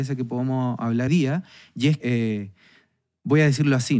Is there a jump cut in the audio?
yes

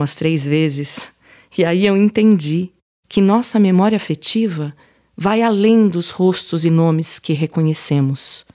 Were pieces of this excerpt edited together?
no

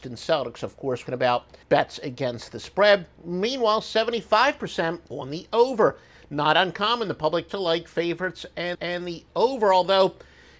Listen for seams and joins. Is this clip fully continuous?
no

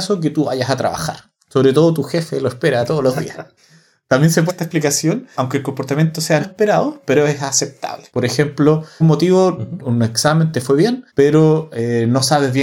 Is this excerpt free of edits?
no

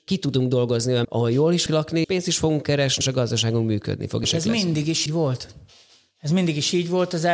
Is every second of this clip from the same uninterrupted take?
no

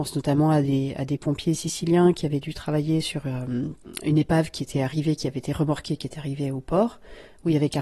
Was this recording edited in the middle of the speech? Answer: no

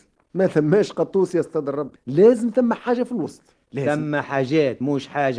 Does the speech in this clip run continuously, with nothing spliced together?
no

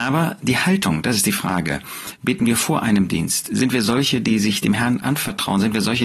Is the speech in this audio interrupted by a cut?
no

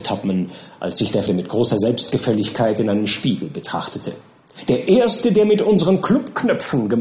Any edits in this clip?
yes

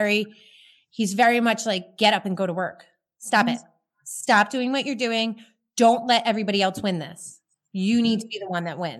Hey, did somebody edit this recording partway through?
no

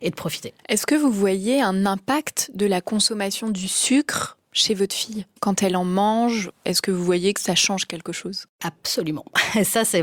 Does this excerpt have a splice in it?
no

